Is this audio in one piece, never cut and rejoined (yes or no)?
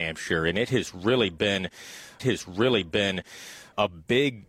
no